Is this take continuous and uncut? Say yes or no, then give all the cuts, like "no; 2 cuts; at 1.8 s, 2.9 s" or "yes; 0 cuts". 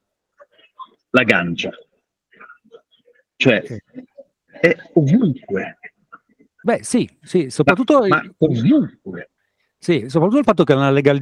yes; 0 cuts